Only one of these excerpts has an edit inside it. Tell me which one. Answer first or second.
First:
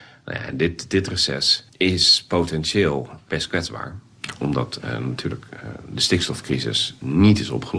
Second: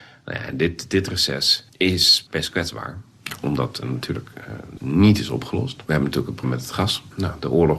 second